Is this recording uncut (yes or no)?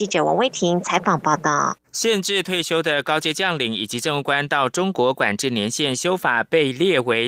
no